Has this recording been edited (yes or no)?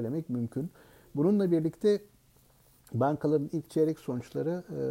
no